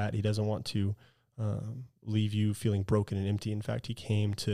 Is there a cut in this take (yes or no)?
no